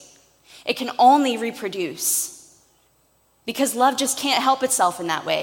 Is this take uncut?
yes; 0 cuts

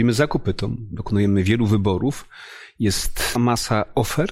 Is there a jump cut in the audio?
yes; 1 cut; at 3.4 s

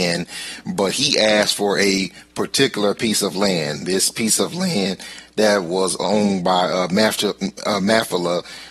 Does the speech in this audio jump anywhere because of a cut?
no; 0 cuts

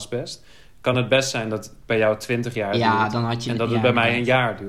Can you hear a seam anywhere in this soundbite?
no; 0 cuts

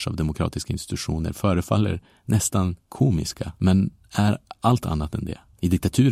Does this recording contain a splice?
no; 0 cuts

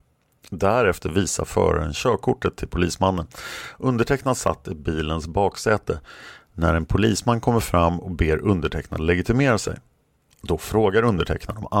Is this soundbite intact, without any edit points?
yes; 0 cuts

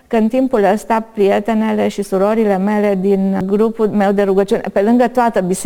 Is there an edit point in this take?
no; 0 cuts

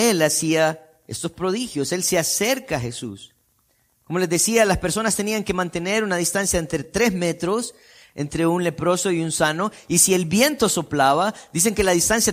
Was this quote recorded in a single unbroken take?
yes; 0 cuts

